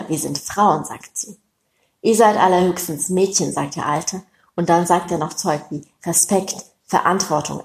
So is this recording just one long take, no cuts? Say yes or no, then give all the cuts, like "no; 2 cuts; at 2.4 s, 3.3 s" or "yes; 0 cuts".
yes; 0 cuts